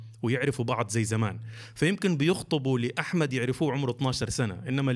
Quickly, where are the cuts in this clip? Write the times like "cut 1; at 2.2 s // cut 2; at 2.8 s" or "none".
none